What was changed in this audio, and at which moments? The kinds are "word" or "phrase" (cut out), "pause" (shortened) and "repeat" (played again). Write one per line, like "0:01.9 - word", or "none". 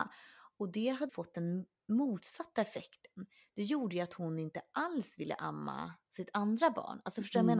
0:01.1 - word